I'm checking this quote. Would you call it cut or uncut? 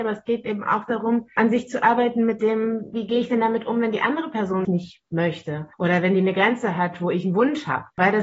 cut